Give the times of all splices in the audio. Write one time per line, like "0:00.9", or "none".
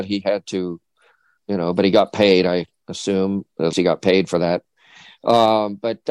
0:03.7